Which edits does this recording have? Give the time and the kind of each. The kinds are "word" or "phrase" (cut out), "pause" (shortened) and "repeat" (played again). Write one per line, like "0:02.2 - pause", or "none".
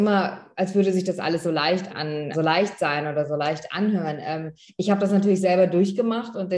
0:01.9 - word
0:02.3 - phrase